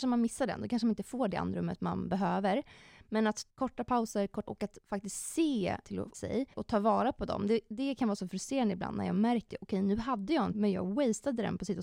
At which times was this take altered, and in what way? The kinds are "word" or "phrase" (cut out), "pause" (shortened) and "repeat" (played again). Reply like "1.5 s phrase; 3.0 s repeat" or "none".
3.5 s word; 4.5 s word; 5.8 s word; 6.1 s word; 6.5 s word; 9.5 s word; 10.5 s word